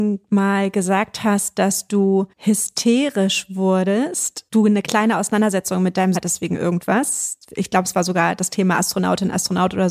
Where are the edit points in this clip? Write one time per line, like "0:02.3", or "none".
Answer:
0:02.3
0:04.5
0:06.1